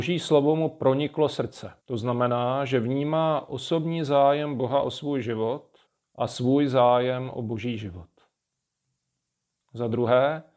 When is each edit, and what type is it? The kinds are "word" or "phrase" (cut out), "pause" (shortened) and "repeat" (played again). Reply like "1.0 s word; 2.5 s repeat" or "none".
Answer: 1.8 s pause; 5.9 s pause